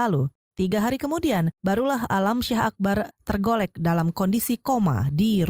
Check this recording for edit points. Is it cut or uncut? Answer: cut